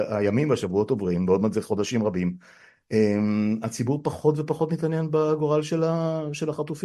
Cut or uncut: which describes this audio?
uncut